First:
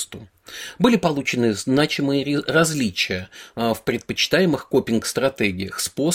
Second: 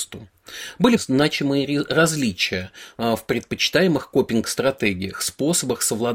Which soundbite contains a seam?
second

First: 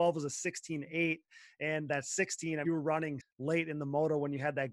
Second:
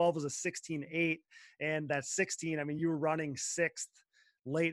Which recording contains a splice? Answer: first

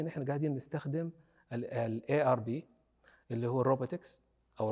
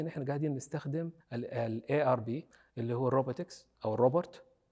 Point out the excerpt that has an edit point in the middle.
second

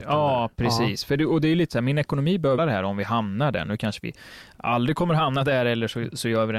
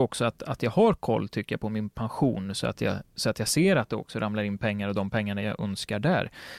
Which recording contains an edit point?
first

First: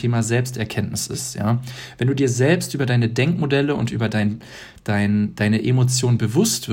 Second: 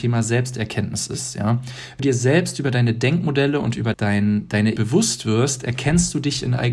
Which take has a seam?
second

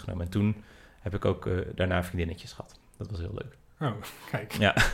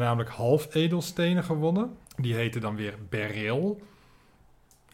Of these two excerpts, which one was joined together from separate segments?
second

